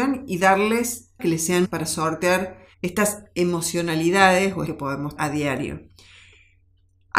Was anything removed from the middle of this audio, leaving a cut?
yes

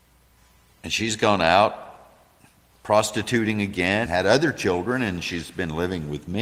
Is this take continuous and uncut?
no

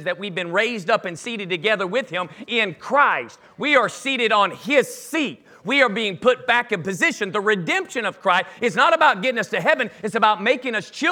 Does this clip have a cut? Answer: no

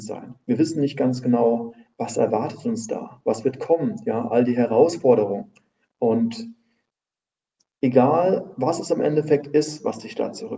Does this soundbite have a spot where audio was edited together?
no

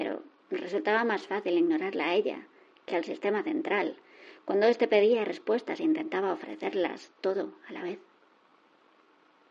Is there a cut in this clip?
no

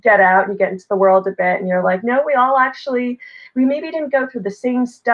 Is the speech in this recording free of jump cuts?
yes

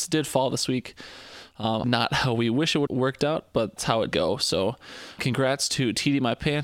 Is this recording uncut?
no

